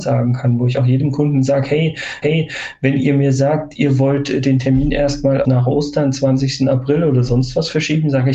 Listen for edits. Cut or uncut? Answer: cut